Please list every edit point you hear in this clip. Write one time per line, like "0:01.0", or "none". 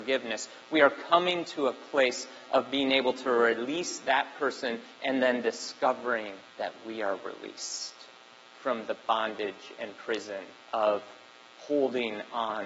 0:06.5
0:08.3
0:10.6